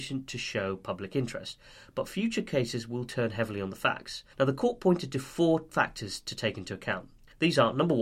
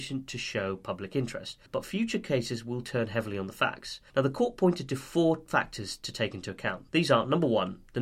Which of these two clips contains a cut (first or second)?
second